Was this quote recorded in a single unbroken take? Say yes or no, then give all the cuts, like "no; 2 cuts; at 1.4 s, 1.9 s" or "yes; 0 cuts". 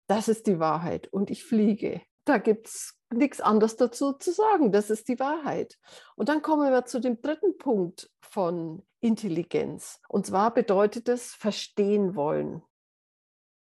no; 2 cuts; at 2.1 s, 10.1 s